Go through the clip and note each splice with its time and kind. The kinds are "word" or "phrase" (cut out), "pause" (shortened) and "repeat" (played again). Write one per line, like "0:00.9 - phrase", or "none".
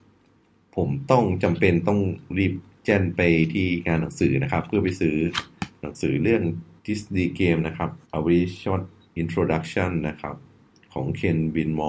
0:02.3 - pause
0:06.8 - pause
0:08.0 - pause
0:09.0 - pause

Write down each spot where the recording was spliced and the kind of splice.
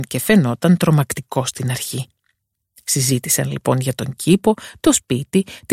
none

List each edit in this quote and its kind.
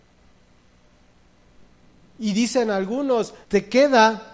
0:03.4 - pause

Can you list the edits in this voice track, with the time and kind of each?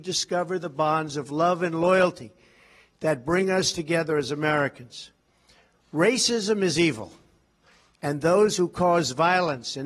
none

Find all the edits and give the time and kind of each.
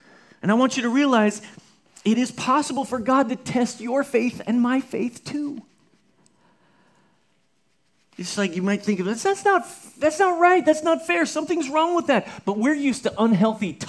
none

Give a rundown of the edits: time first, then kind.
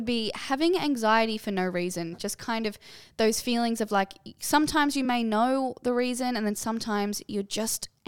none

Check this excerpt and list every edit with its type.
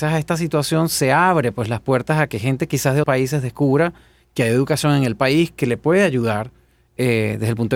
0:03.0 - word

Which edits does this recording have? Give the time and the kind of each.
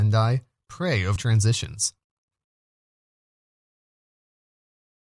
0:01.2 - word

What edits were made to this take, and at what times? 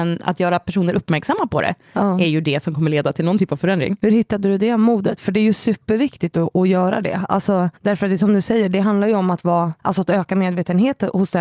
0:07.8 - pause
0:09.8 - pause

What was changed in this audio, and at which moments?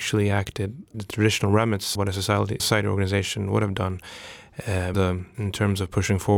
0:00.9 - word
0:02.0 - word
0:02.6 - word
0:04.9 - word
0:05.3 - word

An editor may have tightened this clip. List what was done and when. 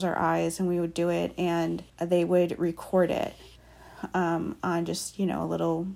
0:01.9 - pause

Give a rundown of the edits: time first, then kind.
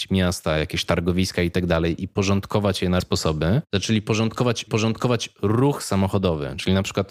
0:03.0 - word
0:04.7 - repeat

